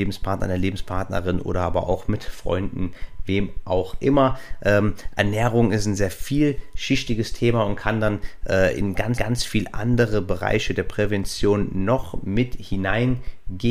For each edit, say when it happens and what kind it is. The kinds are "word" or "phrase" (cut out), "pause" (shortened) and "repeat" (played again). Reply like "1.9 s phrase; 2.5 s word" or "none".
6.0 s word; 9.2 s repeat